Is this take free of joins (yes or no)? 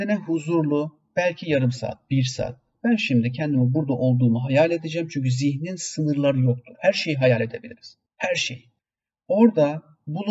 yes